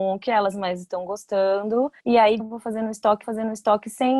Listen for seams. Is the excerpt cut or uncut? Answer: cut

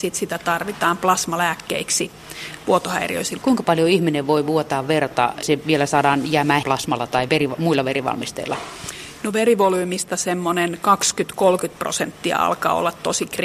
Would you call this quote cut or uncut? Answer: cut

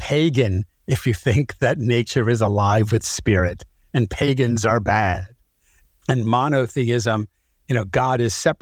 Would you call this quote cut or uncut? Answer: uncut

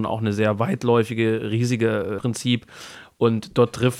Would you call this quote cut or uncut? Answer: cut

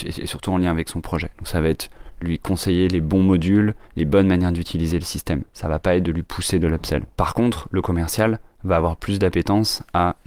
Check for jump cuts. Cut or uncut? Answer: cut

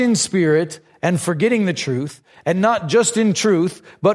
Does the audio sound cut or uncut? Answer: uncut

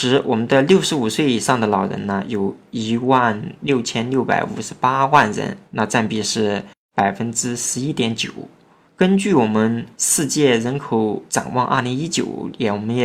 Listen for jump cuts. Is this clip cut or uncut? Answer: cut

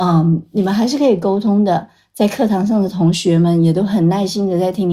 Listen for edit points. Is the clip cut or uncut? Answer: uncut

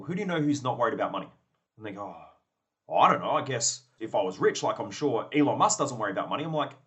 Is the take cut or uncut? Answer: uncut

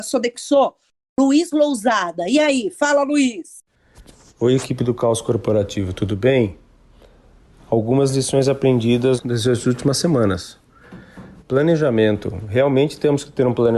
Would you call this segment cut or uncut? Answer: uncut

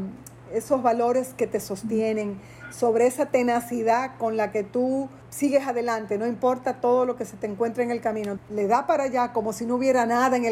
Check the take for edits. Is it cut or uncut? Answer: cut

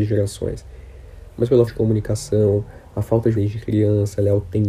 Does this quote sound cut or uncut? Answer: cut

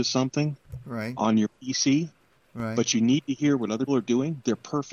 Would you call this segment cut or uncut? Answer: cut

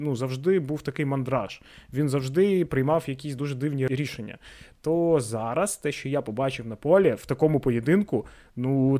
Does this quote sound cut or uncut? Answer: uncut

